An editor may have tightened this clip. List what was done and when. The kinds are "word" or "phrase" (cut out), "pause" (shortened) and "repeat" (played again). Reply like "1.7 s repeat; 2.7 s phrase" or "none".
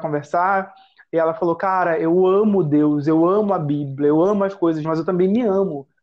4.8 s word